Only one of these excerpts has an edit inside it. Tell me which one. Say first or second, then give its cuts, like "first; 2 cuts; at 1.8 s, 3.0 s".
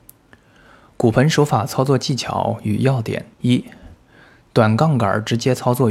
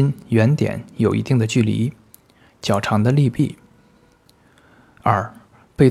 first; 1 cut; at 3.3 s